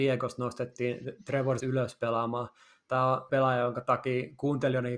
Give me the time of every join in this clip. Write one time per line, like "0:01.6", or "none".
0:01.6
0:03.3